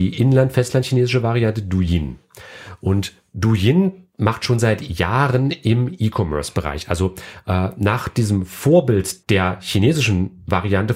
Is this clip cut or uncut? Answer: cut